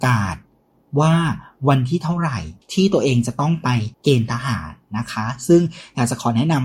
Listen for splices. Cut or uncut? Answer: cut